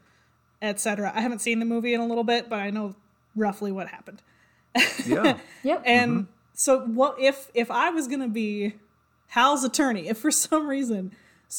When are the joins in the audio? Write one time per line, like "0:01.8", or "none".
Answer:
none